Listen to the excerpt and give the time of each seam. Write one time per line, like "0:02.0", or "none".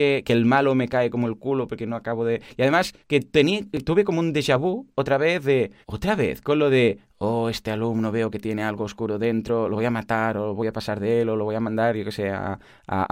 0:03.0
0:05.8